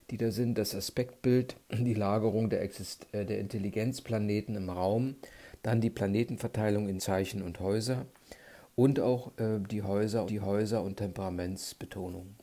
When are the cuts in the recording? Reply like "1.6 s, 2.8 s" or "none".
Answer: 1.6 s, 7.0 s, 10.3 s